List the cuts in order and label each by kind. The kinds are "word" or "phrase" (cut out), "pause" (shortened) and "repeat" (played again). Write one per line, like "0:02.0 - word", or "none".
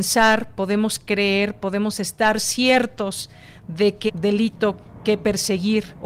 0:04.1 - word